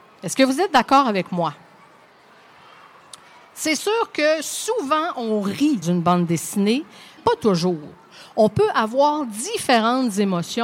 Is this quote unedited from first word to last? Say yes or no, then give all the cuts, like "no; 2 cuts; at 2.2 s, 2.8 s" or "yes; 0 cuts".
no; 2 cuts; at 5.8 s, 7.2 s